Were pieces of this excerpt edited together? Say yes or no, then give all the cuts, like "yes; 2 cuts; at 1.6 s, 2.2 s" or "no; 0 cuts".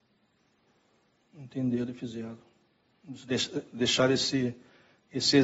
no; 0 cuts